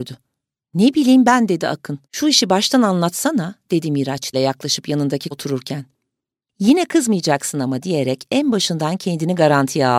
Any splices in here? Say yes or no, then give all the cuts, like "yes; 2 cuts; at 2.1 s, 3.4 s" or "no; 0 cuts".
yes; 3 cuts; at 2.0 s, 4.3 s, 5.3 s